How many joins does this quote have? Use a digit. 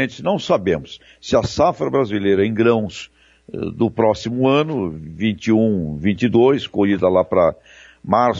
0